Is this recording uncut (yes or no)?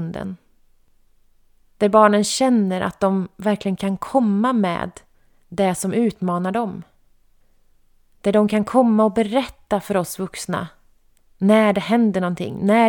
yes